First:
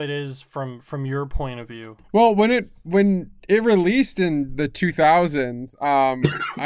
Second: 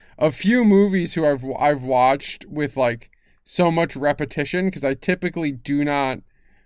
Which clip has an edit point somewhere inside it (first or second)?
first